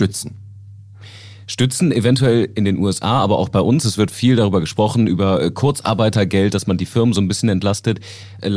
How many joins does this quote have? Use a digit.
0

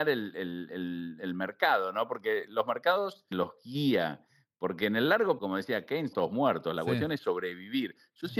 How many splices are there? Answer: 3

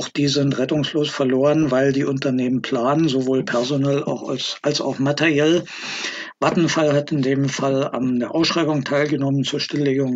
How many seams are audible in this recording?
0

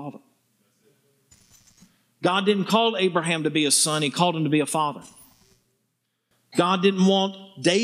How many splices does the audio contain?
0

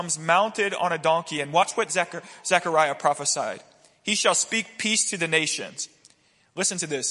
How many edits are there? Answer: 0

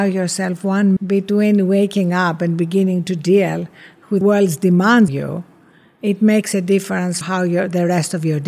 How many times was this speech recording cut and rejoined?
4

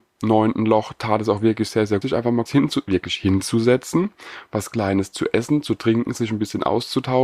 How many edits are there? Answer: 2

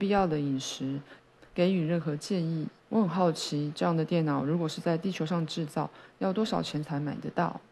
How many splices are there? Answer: 2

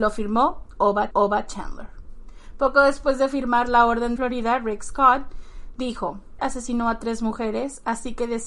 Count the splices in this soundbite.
3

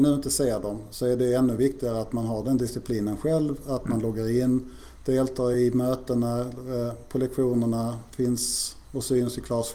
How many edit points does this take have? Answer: 0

